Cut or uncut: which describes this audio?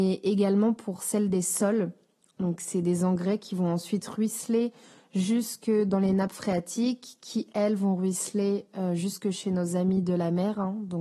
uncut